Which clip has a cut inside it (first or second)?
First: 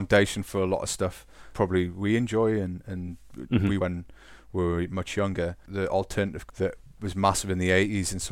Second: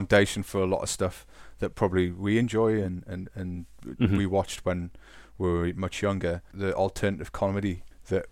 first